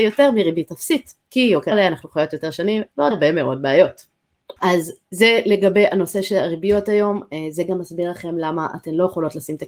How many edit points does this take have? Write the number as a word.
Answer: four